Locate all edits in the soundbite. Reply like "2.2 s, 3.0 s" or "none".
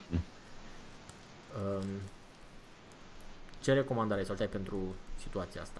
3.6 s, 4.4 s